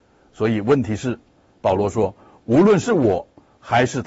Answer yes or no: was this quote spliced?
no